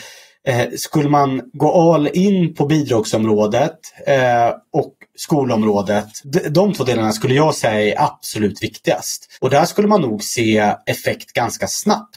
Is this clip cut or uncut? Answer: cut